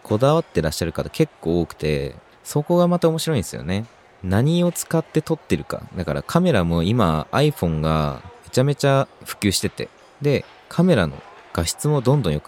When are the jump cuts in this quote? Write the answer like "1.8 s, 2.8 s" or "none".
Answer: none